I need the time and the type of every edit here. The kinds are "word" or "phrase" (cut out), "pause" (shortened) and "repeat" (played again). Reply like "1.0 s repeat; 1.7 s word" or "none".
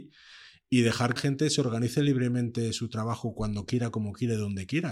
1.2 s phrase